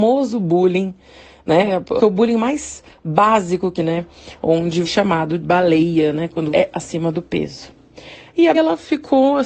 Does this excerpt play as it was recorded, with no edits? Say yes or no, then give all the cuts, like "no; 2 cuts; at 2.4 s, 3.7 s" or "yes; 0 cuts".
no; 6 cuts; at 2.0 s, 3.8 s, 4.8 s, 5.4 s, 6.5 s, 8.5 s